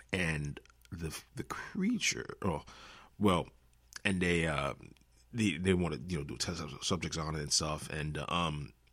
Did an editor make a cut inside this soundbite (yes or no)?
no